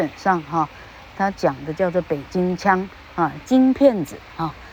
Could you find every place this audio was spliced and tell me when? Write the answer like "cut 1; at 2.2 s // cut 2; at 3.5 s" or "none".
none